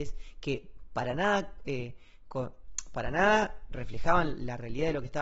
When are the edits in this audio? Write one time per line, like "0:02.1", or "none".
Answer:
0:03.7